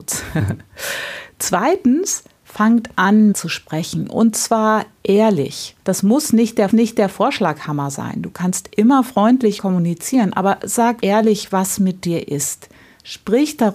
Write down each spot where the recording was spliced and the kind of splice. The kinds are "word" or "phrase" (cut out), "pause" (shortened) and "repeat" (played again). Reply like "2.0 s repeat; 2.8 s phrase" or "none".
3.3 s word; 5.8 s pause; 6.7 s repeat; 9.6 s phrase; 11.0 s word